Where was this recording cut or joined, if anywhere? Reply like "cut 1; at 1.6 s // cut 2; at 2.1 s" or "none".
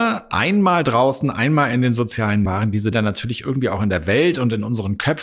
cut 1; at 2.5 s // cut 2; at 2.9 s